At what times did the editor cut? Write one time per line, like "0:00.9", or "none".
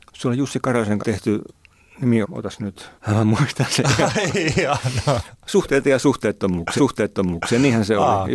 0:01.0
0:02.2
0:03.0
0:03.4
0:06.8